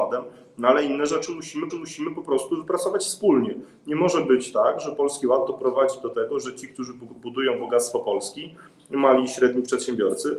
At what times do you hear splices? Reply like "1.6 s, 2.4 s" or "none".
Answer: 1.7 s